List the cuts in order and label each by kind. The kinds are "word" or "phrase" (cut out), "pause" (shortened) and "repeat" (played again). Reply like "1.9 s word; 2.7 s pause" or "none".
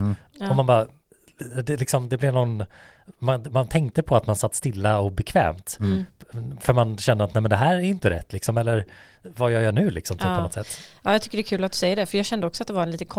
none